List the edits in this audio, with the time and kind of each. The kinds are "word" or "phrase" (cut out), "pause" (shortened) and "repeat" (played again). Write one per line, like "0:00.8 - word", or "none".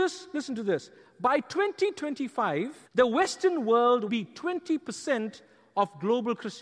0:02.9 - pause
0:04.1 - phrase